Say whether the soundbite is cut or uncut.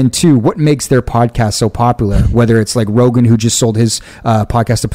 uncut